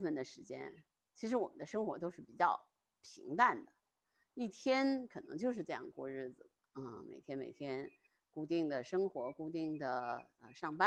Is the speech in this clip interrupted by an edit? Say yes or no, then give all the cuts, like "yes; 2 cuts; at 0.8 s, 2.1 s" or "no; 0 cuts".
no; 0 cuts